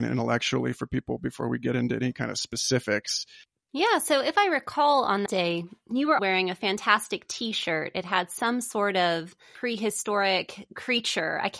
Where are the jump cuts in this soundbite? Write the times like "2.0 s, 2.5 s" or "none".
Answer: 5.3 s, 6.2 s